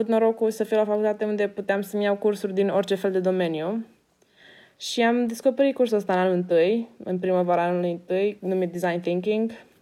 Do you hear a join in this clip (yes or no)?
no